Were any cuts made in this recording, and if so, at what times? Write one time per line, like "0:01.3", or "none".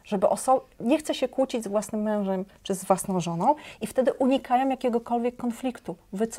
none